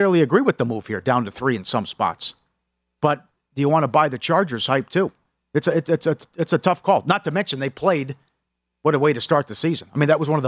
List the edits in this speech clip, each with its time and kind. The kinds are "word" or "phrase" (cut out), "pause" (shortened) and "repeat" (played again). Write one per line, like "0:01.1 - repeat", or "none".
none